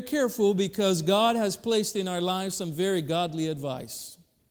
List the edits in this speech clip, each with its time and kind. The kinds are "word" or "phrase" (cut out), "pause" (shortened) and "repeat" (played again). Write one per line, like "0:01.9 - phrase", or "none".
none